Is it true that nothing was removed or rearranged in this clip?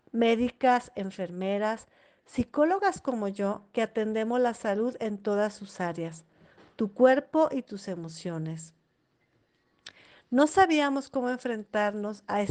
yes; 0 cuts

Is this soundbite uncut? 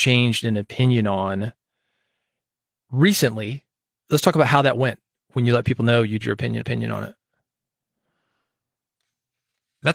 no; 2 cuts; at 6.2 s, 6.6 s

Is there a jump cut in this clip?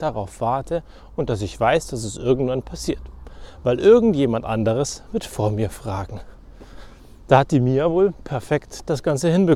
no; 0 cuts

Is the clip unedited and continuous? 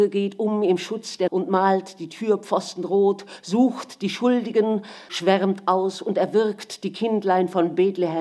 no; 2 cuts; at 1.3 s, 5.1 s

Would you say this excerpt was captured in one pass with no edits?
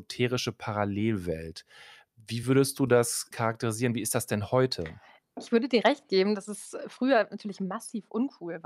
yes; 0 cuts

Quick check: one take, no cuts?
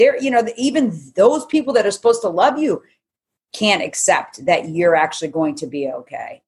yes; 0 cuts

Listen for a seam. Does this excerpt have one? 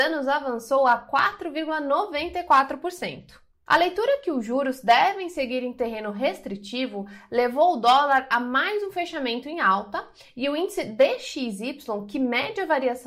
no; 0 cuts

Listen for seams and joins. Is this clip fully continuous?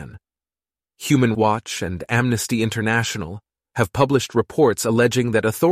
no; 1 cut; at 1.3 s

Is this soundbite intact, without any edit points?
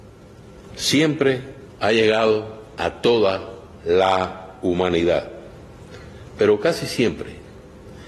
no; 1 cut; at 1.7 s

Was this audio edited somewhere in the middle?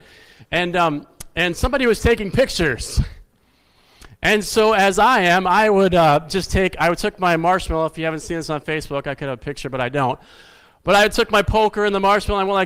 no; 0 cuts

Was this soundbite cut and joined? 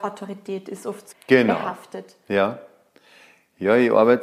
yes; 1 cut; at 1.1 s

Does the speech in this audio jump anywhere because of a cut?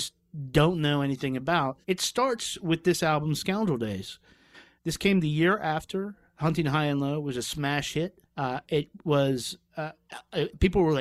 yes; 3 cuts; at 1.8 s, 4.8 s, 8.2 s

